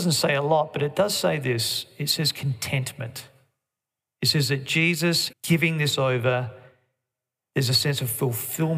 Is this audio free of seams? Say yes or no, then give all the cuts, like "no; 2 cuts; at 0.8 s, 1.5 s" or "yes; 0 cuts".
no; 1 cut; at 5.3 s